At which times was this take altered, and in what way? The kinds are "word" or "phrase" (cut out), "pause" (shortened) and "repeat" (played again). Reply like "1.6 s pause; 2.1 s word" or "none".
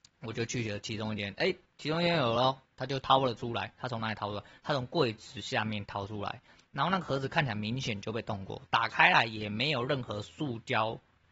none